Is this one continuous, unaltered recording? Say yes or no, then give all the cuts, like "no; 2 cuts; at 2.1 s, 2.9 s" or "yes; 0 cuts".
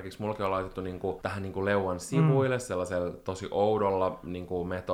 yes; 0 cuts